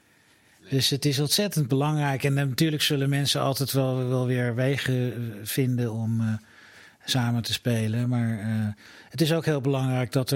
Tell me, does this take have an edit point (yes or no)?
no